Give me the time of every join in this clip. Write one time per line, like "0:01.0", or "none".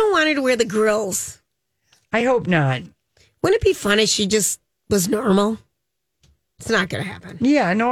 none